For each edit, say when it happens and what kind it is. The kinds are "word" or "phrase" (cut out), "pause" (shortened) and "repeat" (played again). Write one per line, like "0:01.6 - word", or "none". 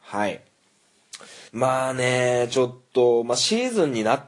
0:01.5 - pause